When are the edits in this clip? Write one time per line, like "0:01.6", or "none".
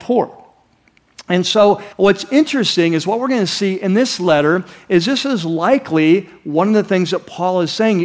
0:01.9